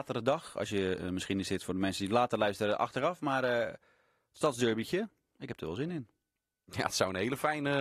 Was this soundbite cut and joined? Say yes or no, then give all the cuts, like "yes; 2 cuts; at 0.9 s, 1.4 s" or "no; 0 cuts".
no; 0 cuts